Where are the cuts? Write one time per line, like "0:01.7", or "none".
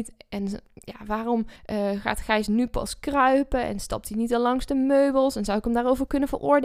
0:01.6